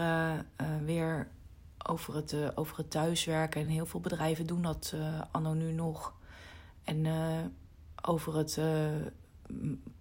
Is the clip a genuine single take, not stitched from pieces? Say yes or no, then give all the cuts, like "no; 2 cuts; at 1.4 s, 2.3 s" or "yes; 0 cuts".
yes; 0 cuts